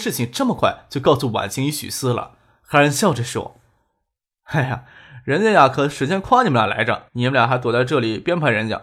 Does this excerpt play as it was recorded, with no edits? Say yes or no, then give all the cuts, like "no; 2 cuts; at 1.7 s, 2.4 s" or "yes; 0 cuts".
no; 1 cut; at 7.1 s